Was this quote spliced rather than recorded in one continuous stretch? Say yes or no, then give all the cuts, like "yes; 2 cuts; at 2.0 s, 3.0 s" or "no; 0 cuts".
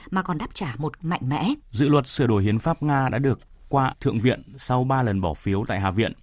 yes; 3 cuts; at 1.0 s, 1.6 s, 3.9 s